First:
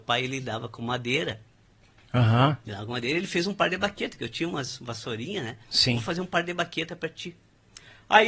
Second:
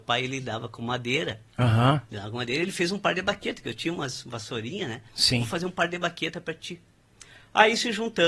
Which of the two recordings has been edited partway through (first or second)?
second